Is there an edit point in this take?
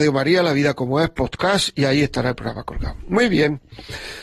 no; 0 cuts

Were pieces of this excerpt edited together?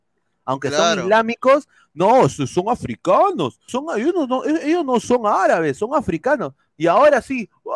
yes; 1 cut; at 3.7 s

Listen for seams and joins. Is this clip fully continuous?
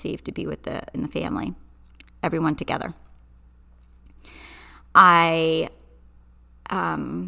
no; 1 cut; at 0.9 s

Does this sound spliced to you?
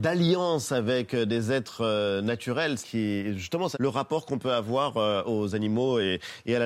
yes; 2 cuts; at 2.8 s, 3.7 s

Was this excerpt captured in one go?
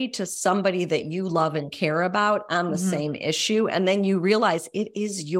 yes; 0 cuts

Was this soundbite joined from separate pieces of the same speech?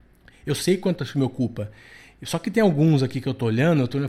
no; 0 cuts

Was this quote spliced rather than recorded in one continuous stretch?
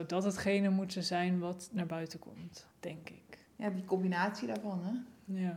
yes; 1 cut; at 2.7 s

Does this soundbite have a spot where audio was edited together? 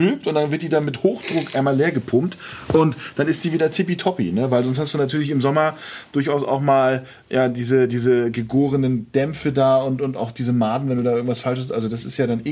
no; 0 cuts

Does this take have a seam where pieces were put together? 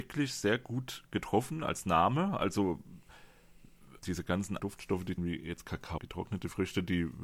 yes; 4 cuts; at 4.0 s, 4.6 s, 5.2 s, 6.0 s

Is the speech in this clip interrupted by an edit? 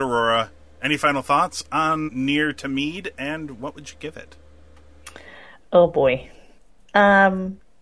yes; 1 cut; at 2.1 s

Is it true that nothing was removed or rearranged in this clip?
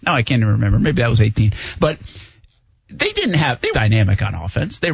no; 1 cut; at 3.7 s

